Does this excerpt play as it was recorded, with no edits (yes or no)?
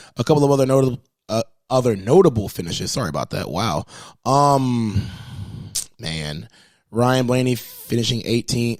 yes